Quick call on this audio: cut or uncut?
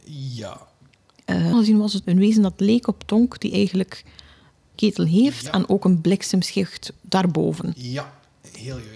cut